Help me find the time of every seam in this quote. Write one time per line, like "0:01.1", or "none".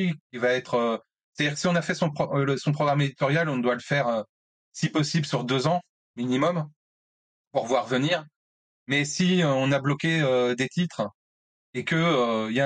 none